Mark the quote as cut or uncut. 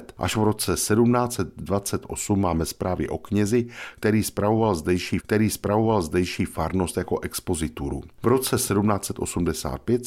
cut